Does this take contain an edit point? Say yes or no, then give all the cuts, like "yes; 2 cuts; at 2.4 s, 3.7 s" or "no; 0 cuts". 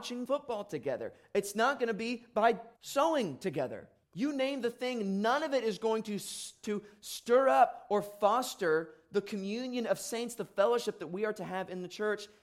yes; 2 cuts; at 2.7 s, 4.0 s